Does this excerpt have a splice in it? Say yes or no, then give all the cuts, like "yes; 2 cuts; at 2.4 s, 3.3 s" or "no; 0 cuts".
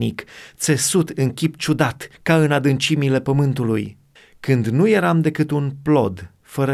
yes; 2 cuts; at 2.1 s, 4.2 s